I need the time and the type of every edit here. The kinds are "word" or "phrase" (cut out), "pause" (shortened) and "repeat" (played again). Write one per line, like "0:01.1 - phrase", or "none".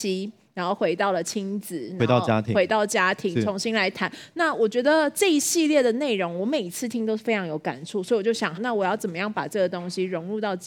0:08.6 - word